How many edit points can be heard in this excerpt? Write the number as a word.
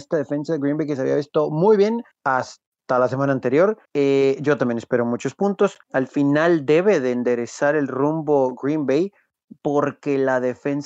three